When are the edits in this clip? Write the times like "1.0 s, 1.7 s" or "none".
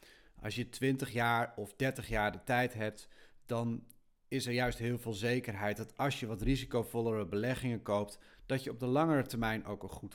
none